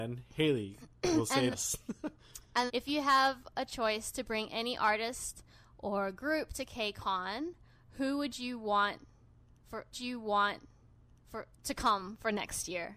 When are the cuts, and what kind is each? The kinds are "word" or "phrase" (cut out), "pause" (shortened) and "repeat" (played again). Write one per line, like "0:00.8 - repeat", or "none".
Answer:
0:01.5 - word
0:02.7 - word
0:09.9 - repeat

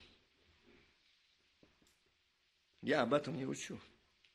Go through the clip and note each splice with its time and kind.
none

